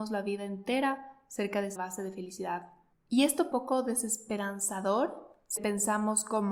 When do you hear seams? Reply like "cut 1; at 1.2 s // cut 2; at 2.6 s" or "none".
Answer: cut 1; at 1.8 s // cut 2; at 2.9 s // cut 3; at 3.5 s // cut 4; at 5.6 s